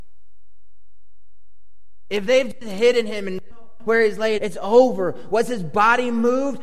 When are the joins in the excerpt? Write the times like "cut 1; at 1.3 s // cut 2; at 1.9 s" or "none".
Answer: cut 1; at 3.5 s // cut 2; at 4.4 s